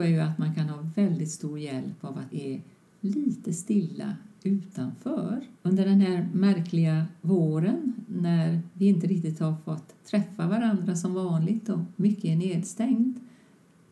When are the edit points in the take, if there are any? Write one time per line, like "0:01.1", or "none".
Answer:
0:02.3
0:05.6